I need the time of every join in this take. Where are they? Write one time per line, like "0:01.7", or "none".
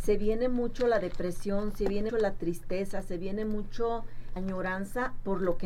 0:02.1
0:04.4